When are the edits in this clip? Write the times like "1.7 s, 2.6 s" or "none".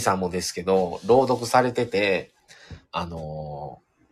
2.8 s